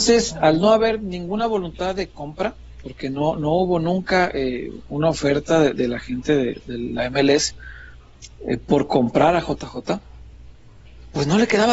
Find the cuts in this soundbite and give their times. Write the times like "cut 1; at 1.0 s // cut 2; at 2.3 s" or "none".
none